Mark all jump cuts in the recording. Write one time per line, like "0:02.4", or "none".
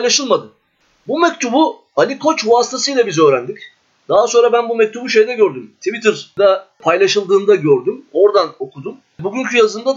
none

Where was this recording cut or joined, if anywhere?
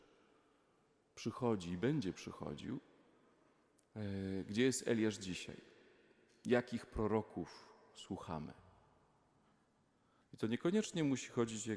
none

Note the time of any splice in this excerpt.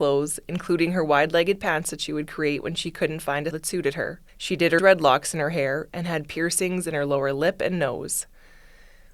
0:03.5
0:04.3
0:04.8

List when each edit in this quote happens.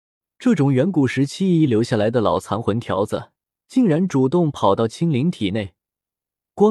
0:03.5

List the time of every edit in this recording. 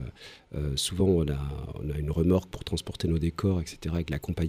none

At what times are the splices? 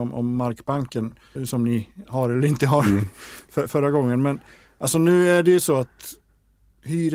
0:01.4
0:03.7

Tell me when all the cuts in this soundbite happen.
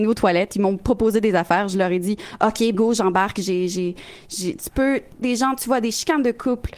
0:02.7
0:05.2

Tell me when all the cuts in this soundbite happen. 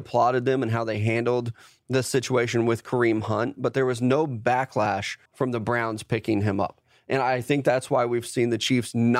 0:05.3

